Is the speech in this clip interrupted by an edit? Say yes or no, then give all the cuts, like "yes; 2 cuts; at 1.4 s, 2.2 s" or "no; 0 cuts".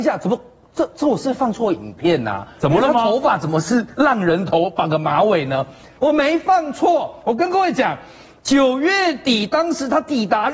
no; 0 cuts